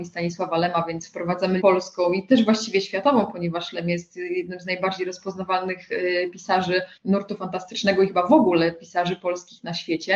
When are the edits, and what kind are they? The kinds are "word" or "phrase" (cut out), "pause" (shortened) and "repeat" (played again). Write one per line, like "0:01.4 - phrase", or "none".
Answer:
0:01.6 - phrase
0:07.0 - pause